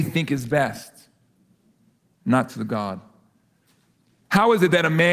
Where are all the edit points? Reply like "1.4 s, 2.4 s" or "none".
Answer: 2.5 s